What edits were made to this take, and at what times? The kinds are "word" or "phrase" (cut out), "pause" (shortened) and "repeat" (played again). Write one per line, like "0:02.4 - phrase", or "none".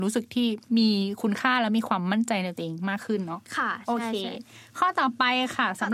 0:03.5 - pause